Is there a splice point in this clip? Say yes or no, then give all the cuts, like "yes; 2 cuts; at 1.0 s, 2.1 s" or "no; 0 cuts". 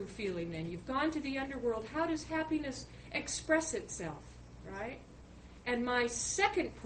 no; 0 cuts